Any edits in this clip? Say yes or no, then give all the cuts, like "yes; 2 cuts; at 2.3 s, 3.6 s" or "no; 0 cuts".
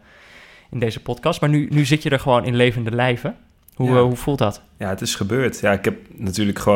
no; 0 cuts